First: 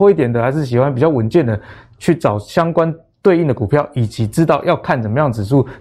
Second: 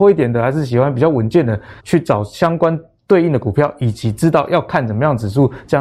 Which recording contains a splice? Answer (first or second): second